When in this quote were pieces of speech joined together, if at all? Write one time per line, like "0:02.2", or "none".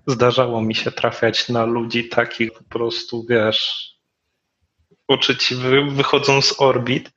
0:02.5